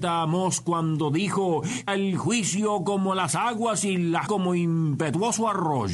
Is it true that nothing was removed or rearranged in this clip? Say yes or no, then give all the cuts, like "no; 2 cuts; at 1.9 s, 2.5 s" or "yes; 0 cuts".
no; 2 cuts; at 1.9 s, 4.3 s